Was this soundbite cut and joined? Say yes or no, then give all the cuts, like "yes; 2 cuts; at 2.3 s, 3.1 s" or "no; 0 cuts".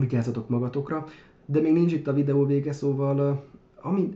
no; 0 cuts